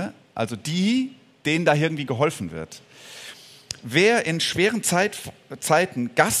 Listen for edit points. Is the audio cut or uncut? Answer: uncut